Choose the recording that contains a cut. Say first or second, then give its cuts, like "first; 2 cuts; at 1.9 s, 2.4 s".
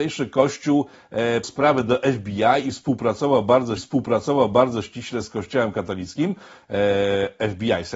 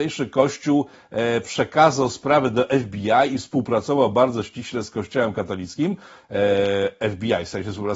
first; 2 cuts; at 1.4 s, 3.8 s